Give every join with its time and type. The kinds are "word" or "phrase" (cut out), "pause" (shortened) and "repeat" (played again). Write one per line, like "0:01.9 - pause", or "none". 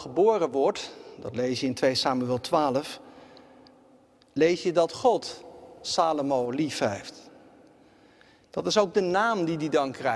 none